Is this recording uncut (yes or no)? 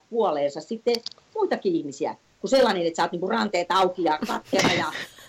yes